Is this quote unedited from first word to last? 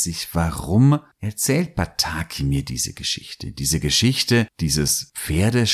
yes; 0 cuts

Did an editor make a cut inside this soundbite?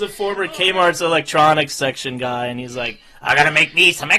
no; 0 cuts

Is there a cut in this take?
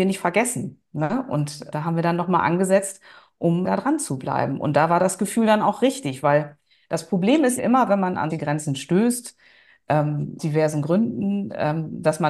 yes; 5 cuts; at 1.7 s, 3.6 s, 7.6 s, 8.3 s, 10.4 s

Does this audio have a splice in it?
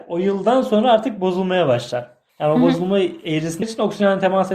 yes; 2 cuts; at 2.3 s, 3.6 s

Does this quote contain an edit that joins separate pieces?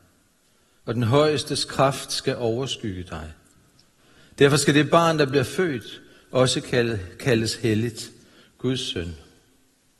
no; 0 cuts

